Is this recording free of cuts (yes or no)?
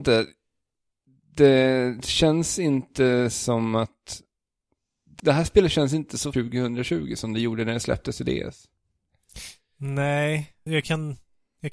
no